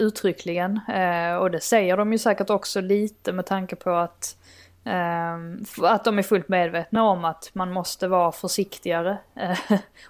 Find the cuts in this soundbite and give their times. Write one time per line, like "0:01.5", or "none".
none